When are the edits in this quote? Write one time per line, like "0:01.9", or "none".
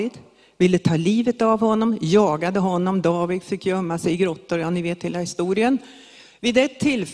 none